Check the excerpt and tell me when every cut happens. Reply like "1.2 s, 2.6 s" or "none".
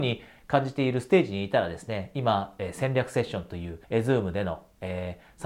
3.8 s